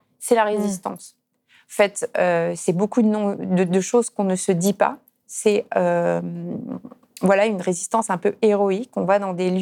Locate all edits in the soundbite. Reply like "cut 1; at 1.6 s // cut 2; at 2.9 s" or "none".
none